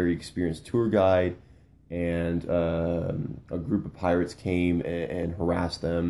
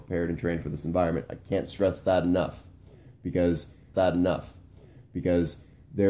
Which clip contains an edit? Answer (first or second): second